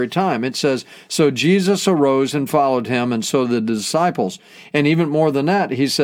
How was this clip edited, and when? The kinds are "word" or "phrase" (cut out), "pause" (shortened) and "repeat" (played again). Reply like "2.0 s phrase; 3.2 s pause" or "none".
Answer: none